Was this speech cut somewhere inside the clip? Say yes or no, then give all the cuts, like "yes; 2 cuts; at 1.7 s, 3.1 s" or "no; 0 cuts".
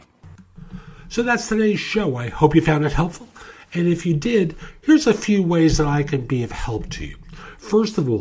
no; 0 cuts